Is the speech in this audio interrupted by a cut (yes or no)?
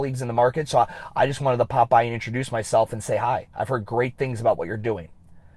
no